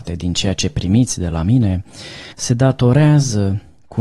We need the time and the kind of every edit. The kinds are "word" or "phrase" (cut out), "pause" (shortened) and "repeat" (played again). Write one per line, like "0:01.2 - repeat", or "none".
0:02.3 - pause